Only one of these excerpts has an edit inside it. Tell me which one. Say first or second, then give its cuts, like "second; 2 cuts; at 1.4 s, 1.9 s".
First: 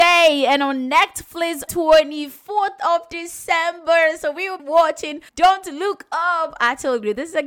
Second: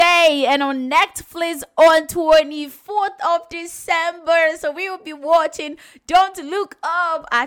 first; 3 cuts; at 1.7 s, 4.6 s, 5.3 s